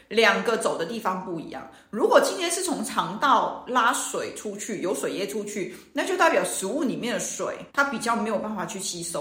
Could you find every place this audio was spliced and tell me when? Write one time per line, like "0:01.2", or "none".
0:07.7